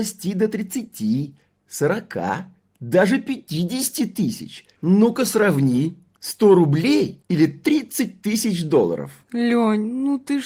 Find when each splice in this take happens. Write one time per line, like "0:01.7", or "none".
none